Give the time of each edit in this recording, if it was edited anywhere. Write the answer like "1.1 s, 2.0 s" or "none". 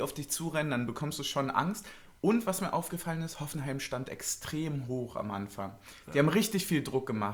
none